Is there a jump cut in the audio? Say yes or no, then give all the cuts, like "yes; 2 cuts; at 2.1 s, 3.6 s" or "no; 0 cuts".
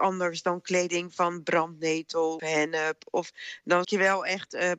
yes; 2 cuts; at 2.4 s, 3.8 s